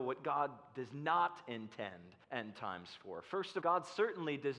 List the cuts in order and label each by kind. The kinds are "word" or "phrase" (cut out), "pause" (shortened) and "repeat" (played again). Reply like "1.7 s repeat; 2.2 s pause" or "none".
2.2 s pause; 3.6 s word

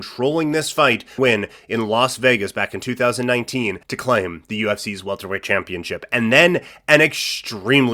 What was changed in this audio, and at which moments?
1.2 s phrase; 3.8 s pause

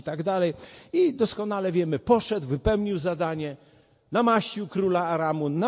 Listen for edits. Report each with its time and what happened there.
none

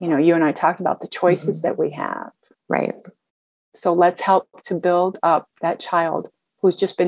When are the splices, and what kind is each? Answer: 2.5 s pause

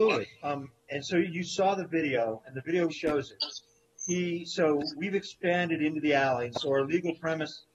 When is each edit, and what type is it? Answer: 2.9 s word

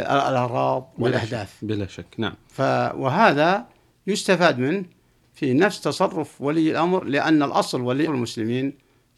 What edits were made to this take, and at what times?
8.1 s word

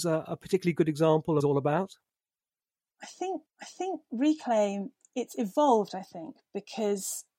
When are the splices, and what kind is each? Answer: 1.4 s phrase; 3.5 s repeat

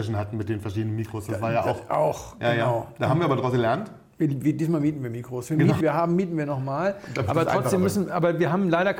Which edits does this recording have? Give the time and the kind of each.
5.8 s phrase

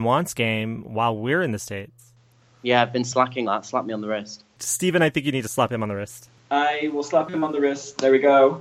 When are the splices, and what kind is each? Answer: 3.5 s word

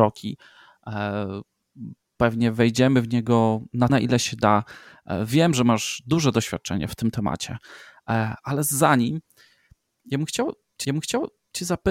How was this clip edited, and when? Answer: 3.9 s word; 10.8 s repeat

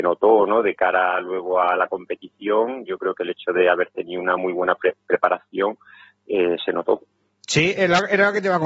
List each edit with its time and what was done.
none

